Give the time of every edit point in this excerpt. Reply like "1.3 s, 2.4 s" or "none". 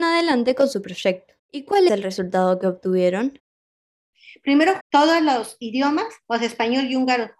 1.4 s, 1.9 s, 4.8 s